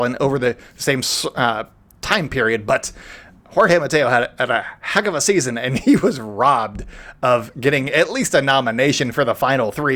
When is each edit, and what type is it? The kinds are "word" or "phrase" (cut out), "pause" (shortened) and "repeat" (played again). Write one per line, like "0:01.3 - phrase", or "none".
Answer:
none